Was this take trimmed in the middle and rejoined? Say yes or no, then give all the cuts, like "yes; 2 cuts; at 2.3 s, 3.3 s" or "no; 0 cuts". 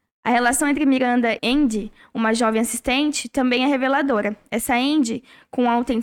yes; 1 cut; at 1.4 s